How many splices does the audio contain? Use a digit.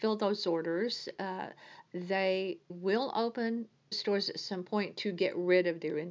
2